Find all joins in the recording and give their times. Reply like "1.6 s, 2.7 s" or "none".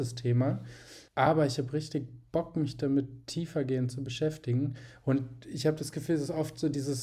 1.1 s